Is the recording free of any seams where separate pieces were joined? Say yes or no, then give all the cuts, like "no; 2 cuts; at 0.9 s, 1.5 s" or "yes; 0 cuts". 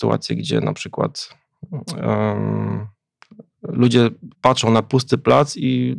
no; 1 cut; at 4.3 s